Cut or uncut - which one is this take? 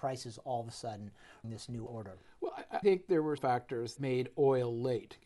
cut